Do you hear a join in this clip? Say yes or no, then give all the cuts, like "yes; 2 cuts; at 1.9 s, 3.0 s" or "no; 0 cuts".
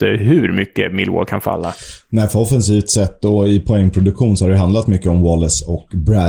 no; 0 cuts